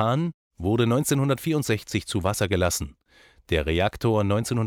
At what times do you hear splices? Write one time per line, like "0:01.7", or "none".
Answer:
none